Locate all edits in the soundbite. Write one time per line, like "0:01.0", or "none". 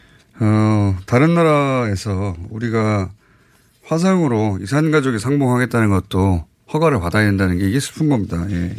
none

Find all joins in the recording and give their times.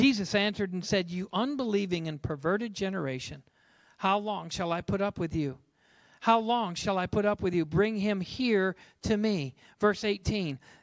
none

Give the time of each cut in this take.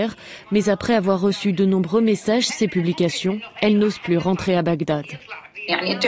0:02.5

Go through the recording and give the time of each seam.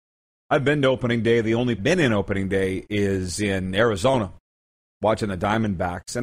0:01.8

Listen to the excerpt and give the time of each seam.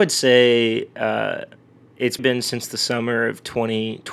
0:02.2

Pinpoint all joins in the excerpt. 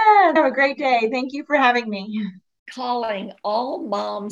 none

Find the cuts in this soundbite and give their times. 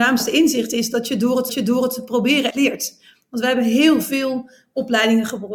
0:01.5
0:02.5

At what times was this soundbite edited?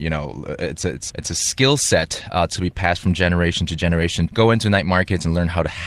0:01.1
0:04.3

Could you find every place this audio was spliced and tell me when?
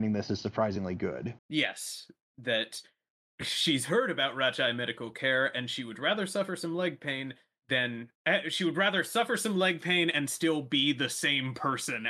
0:01.4
0:08.2

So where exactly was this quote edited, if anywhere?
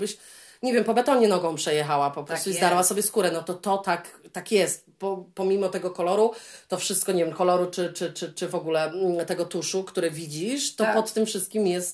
none

